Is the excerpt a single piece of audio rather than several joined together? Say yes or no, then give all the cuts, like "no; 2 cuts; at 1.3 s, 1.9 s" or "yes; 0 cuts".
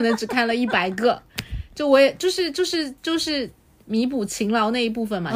yes; 0 cuts